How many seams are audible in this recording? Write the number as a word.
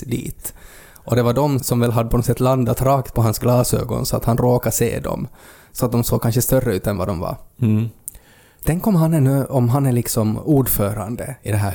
one